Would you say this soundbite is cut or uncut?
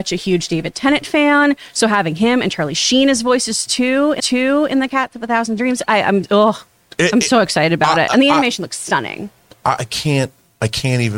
cut